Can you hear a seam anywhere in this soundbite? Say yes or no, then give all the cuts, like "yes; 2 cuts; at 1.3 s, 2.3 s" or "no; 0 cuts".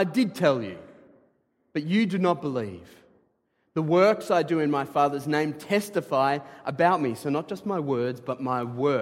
no; 0 cuts